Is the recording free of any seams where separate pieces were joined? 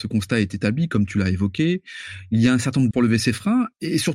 no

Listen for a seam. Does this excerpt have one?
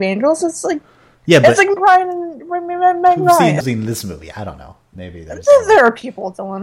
yes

